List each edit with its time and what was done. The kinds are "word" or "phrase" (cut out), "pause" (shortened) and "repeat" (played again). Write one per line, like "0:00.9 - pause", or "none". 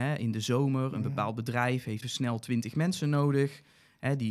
0:02.0 - word